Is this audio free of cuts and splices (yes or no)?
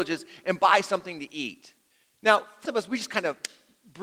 no